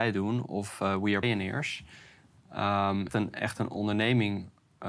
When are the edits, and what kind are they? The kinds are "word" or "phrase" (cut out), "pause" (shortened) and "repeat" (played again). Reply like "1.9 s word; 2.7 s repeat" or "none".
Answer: 1.2 s word; 3.1 s word